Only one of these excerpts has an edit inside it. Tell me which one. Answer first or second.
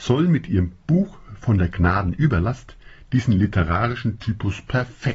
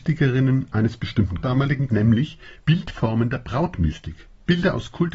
second